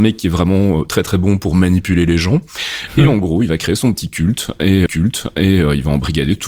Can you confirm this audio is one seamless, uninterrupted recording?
no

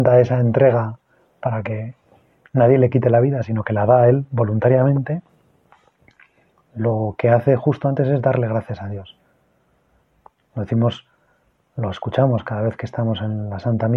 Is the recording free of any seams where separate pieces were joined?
yes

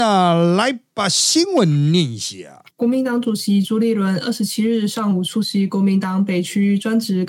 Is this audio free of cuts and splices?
no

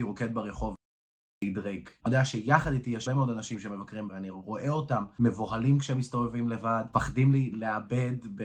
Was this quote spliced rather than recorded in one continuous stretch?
yes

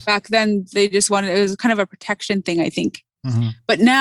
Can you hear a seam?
no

